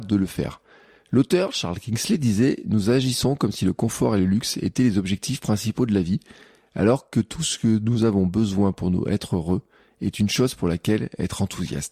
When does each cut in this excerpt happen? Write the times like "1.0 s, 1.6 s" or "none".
none